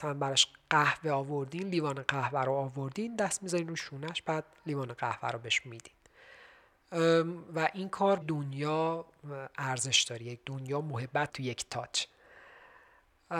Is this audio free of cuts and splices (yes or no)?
no